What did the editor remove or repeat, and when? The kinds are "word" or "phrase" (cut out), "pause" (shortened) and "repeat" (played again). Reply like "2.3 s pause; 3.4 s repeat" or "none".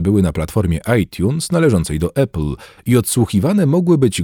none